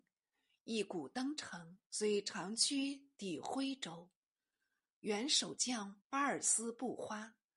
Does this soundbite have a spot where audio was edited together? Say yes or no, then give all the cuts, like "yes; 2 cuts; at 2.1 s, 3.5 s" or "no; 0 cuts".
yes; 2 cuts; at 1.9 s, 6.0 s